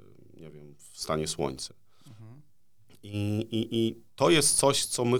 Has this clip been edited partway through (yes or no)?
no